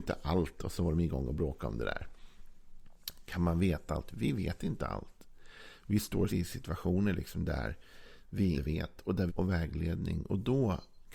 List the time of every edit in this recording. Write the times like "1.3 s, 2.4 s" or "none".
6.3 s, 8.5 s, 9.3 s